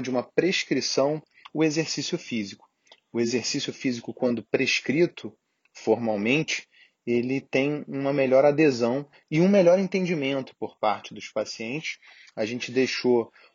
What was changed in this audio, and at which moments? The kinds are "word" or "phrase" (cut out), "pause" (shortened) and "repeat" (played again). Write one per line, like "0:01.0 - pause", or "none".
none